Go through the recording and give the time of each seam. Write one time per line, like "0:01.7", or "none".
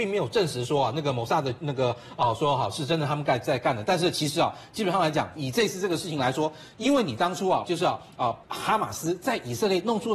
0:05.4
0:07.6
0:08.4